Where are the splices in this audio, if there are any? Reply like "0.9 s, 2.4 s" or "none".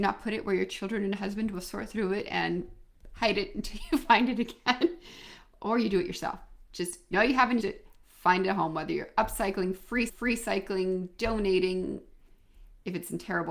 7.1 s, 7.6 s, 8.0 s, 10.1 s